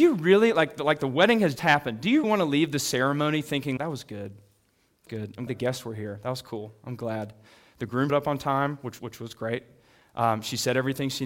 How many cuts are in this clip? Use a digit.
7